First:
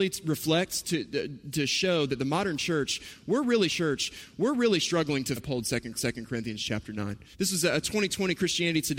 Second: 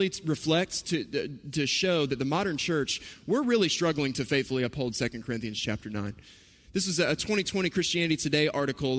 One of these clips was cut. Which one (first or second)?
first